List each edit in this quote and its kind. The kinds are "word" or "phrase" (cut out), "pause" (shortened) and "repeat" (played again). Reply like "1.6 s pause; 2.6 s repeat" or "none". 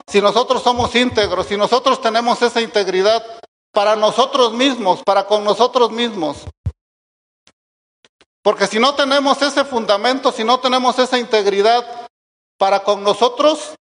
none